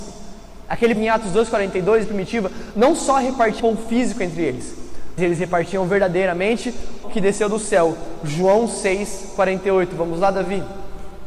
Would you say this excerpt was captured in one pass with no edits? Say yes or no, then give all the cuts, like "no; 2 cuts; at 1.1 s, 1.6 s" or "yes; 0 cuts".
no; 5 cuts; at 1.0 s, 2.0 s, 3.6 s, 5.2 s, 7.0 s